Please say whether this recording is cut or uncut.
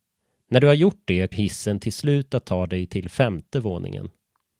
cut